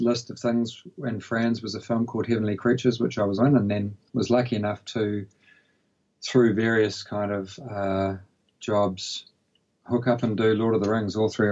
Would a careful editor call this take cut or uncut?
cut